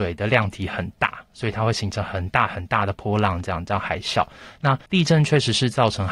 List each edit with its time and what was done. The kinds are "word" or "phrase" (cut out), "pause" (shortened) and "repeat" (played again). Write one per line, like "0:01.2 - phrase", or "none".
0:04.9 - pause